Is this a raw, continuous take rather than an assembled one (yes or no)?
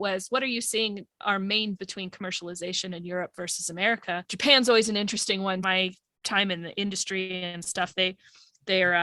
no